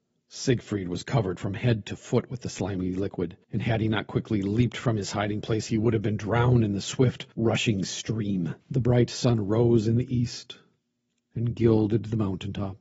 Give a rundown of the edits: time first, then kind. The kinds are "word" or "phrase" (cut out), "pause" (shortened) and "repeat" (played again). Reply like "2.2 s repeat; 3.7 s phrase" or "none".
3.4 s pause; 7.3 s pause; 8.6 s pause